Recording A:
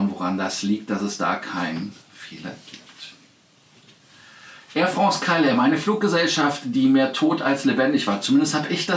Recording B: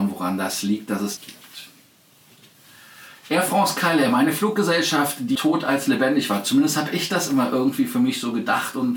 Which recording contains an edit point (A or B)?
B